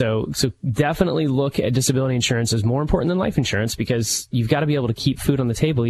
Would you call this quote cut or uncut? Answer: uncut